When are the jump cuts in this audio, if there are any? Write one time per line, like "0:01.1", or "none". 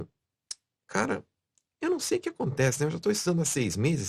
none